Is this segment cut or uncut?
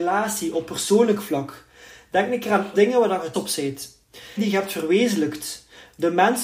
cut